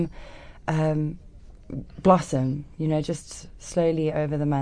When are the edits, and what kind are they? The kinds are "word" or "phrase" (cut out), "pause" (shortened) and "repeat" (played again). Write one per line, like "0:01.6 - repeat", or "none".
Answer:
none